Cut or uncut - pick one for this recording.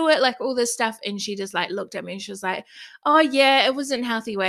uncut